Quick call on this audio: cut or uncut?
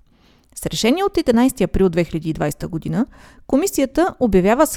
uncut